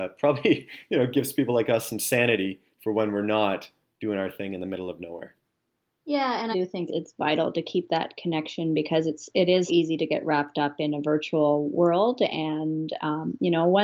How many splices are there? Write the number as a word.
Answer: three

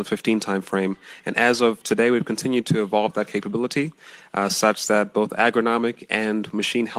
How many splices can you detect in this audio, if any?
zero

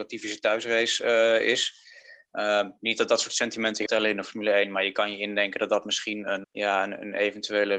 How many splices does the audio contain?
two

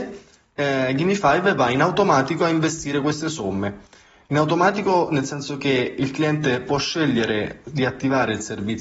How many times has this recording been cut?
zero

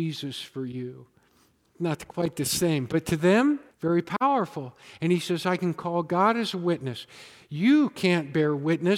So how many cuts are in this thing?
one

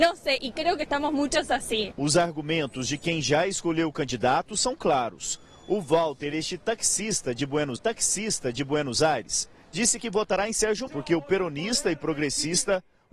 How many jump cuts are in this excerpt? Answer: two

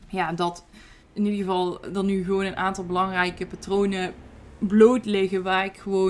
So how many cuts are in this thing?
one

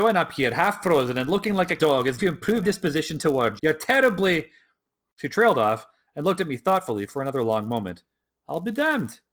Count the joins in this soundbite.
four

